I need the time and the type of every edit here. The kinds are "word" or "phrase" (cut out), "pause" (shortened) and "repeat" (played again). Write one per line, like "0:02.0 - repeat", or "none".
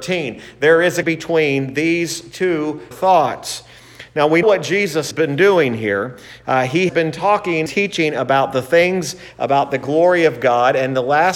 0:01.0 - word
0:02.9 - word
0:04.4 - word
0:05.1 - word
0:06.9 - word
0:07.7 - word